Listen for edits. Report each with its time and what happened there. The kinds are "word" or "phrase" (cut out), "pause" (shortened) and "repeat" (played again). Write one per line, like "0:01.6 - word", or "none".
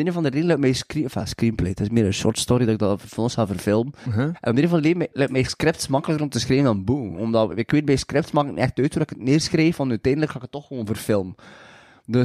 none